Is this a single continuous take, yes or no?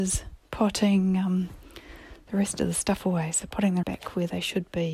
no